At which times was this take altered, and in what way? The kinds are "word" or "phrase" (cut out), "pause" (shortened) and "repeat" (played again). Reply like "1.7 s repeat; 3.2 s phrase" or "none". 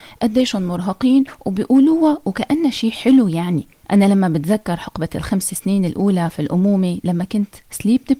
none